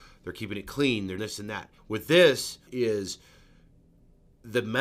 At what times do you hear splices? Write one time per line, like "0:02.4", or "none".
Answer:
0:01.2
0:01.8
0:02.7